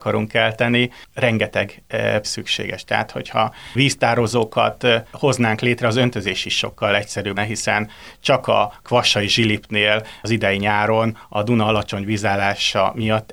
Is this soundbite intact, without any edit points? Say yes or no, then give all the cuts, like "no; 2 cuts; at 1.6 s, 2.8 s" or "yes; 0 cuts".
no; 2 cuts; at 2.2 s, 7.4 s